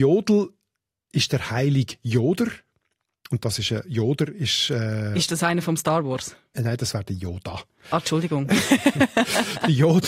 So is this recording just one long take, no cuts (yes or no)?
yes